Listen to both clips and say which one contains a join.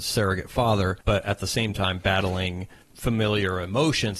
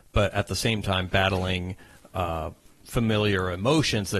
first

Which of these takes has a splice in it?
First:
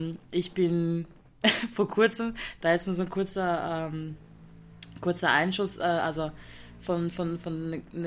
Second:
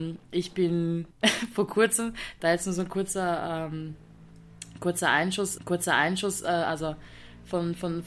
second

